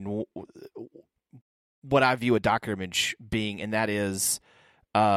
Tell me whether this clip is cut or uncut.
uncut